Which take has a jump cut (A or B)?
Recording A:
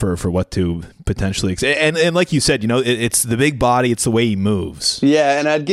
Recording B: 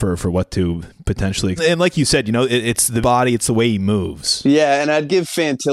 B